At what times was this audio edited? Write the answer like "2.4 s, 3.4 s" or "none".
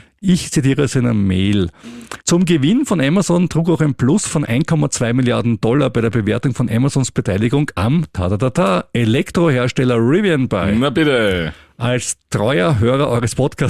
2.2 s